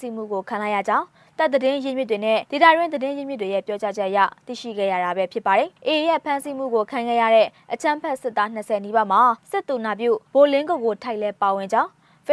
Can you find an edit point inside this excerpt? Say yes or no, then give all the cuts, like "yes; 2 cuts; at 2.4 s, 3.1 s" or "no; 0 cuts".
yes; 4 cuts; at 2.5 s, 5.8 s, 9.4 s, 10.3 s